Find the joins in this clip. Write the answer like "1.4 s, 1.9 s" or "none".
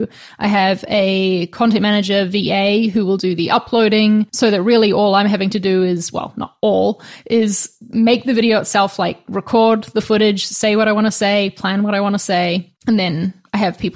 4.3 s, 12.8 s